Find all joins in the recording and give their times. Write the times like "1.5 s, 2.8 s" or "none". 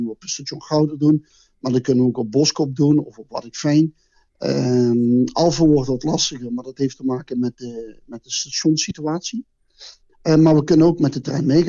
none